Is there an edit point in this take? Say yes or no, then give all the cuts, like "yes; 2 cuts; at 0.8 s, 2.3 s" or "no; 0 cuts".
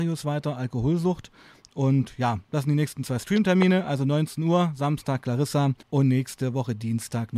yes; 1 cut; at 5.8 s